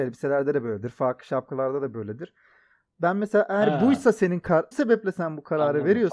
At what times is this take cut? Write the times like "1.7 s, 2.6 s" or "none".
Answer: 4.7 s

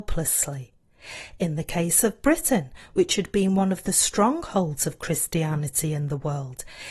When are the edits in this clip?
none

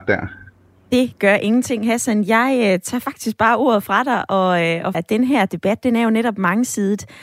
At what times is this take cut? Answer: 4.9 s

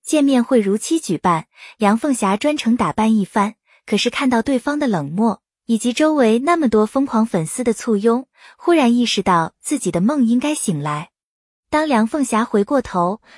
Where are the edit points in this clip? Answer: none

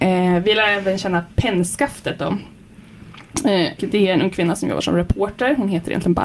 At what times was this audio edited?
3.8 s

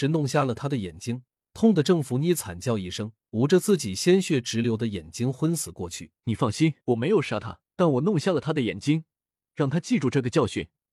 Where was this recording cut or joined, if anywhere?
1.4 s, 3.2 s, 6.2 s, 6.8 s, 7.7 s

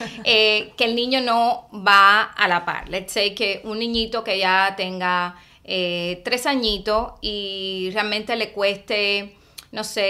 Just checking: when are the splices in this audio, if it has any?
none

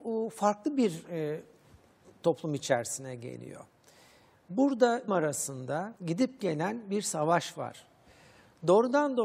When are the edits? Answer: 5.1 s, 6.0 s

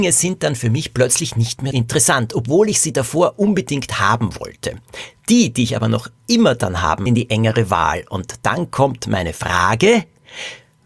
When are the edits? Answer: 1.7 s, 7.1 s

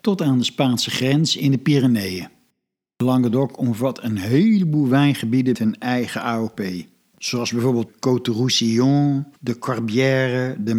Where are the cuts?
5.5 s, 7.9 s, 9.3 s

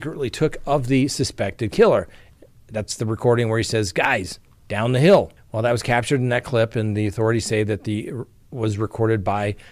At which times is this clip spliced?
none

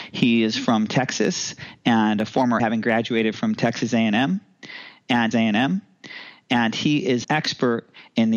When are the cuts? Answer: 2.6 s, 5.3 s, 7.2 s

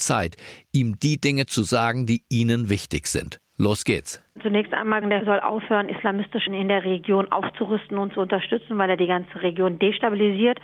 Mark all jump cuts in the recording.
5.0 s, 6.5 s

